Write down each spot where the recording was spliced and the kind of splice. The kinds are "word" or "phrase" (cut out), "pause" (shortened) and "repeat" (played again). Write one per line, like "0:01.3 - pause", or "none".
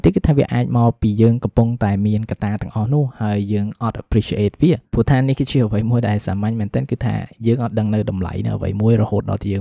none